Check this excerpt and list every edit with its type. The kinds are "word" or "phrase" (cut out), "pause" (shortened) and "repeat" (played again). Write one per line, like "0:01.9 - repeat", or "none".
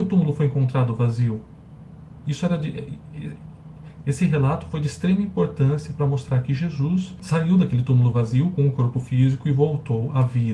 none